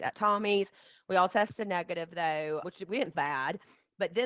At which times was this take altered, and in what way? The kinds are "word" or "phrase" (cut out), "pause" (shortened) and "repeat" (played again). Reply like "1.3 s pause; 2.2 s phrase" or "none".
2.6 s word; 3.1 s word